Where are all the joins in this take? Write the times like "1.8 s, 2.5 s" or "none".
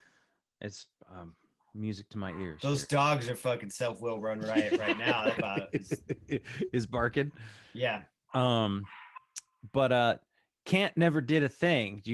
5.4 s